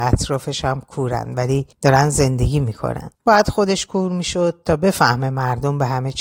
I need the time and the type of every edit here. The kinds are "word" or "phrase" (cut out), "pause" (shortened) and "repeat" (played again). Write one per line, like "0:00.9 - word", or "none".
0:01.7 - pause
0:03.1 - pause